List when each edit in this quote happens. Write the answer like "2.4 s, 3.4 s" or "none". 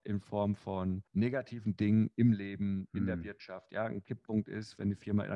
1.1 s